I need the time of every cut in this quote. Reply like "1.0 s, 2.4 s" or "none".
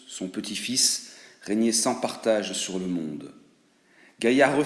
none